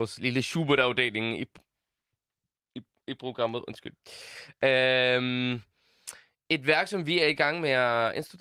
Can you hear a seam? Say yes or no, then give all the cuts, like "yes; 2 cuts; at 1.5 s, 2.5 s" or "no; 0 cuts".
no; 0 cuts